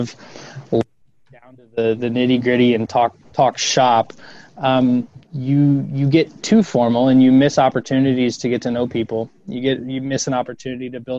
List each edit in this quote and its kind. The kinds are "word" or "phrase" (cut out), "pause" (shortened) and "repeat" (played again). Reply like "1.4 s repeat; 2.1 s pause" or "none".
3.2 s pause